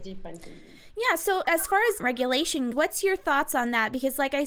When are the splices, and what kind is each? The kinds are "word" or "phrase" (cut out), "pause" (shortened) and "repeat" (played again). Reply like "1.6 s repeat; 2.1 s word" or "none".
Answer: 1.4 s word; 2.0 s word; 2.7 s word